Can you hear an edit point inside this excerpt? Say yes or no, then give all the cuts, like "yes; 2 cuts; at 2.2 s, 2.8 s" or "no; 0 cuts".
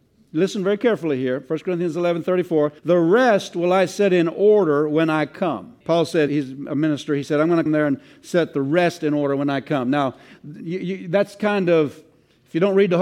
yes; 4 cuts; at 2.8 s, 5.8 s, 6.3 s, 7.7 s